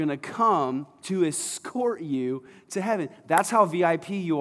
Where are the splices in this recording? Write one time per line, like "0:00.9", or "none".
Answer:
none